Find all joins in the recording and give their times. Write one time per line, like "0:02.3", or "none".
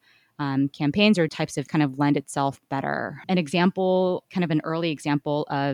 0:01.3
0:01.7
0:04.3

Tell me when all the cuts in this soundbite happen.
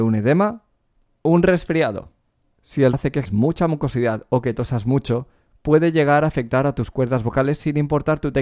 0:02.9
0:03.3

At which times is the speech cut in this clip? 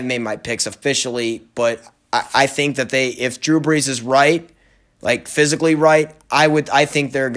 none

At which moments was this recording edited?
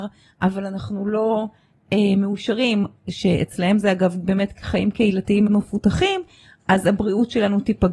0:05.5

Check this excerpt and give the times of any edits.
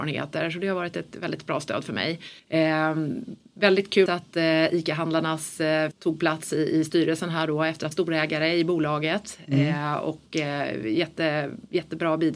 0:01.1
0:02.4
0:04.1
0:05.9
0:07.9

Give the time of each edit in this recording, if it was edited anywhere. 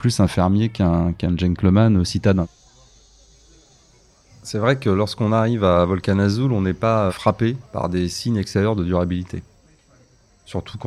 0:07.1
0:07.6

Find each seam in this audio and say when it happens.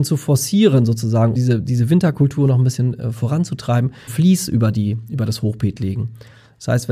0:01.3
0:04.1

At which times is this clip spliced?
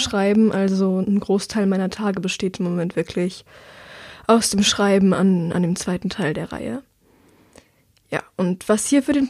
none

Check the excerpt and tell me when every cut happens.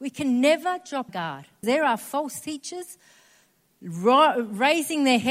0:01.1
0:01.6

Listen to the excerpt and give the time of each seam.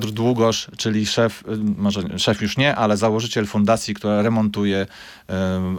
none

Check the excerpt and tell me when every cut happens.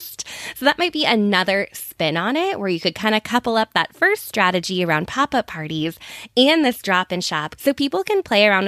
0:07.6

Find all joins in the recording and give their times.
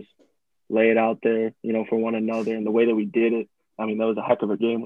none

